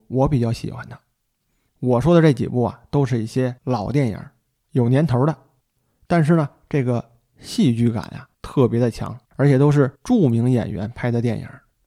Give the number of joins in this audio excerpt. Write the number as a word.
four